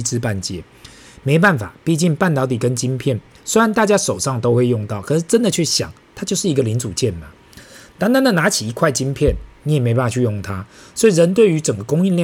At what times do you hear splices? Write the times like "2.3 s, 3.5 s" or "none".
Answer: none